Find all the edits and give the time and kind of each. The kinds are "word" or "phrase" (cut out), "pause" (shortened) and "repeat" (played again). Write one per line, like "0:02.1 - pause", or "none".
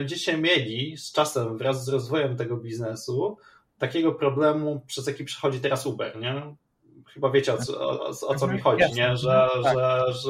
none